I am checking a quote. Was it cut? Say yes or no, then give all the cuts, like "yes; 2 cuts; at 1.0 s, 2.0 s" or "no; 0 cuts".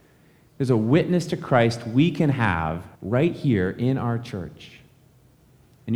yes; 1 cut; at 2.9 s